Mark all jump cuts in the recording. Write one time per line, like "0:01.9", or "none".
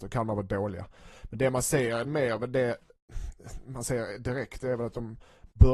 none